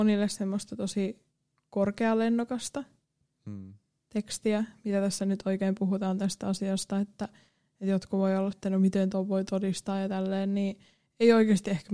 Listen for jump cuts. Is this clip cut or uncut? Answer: cut